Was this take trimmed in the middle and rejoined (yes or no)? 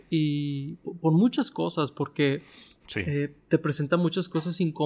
no